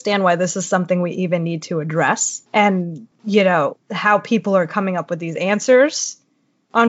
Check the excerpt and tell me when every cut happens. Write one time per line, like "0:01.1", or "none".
0:02.5
0:03.8

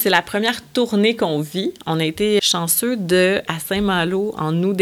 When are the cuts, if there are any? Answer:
0:02.4
0:03.5

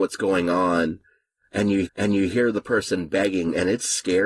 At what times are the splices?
0:01.9

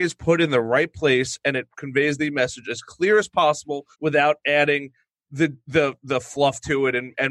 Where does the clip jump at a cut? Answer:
0:03.9

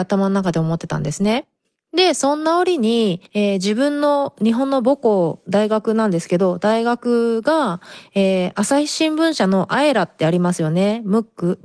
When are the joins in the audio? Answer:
0:01.6
0:03.3

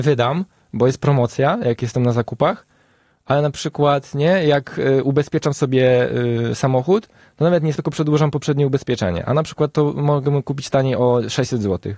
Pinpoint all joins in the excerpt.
0:07.8

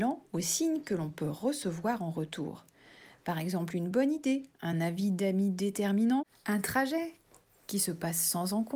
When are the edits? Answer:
none

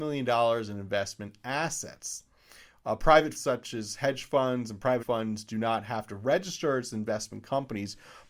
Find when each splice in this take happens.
0:03.3
0:05.0

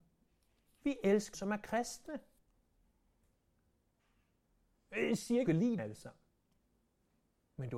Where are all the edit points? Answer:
0:01.3
0:05.5
0:05.8

